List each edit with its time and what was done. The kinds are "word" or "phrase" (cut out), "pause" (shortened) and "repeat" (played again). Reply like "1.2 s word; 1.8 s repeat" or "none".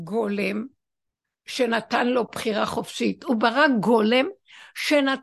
none